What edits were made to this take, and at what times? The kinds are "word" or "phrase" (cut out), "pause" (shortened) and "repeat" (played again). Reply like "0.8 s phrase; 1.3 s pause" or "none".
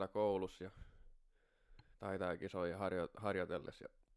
1.9 s pause